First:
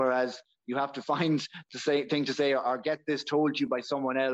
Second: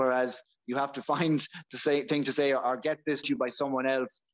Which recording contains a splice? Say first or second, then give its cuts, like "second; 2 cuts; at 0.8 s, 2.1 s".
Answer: second; 1 cut; at 3.2 s